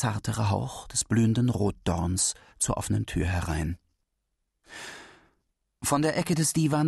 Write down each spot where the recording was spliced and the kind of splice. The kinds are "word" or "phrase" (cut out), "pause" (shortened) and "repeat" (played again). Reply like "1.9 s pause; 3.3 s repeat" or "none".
none